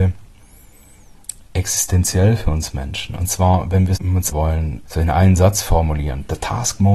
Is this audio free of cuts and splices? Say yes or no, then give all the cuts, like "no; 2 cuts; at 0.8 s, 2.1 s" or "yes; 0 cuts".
no; 3 cuts; at 4.0 s, 4.3 s, 4.8 s